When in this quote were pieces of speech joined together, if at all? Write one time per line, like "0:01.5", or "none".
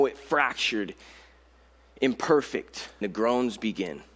0:03.0